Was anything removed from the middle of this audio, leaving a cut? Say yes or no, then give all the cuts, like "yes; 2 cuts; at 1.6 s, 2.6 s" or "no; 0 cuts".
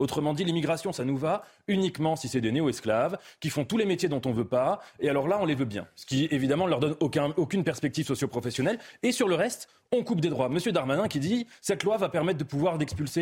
no; 0 cuts